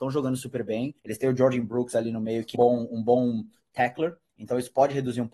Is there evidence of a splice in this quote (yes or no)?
yes